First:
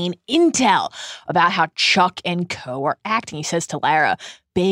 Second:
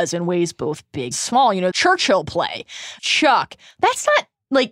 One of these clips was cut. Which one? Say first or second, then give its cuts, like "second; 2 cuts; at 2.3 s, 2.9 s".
second; 3 cuts; at 1.1 s, 1.7 s, 3.0 s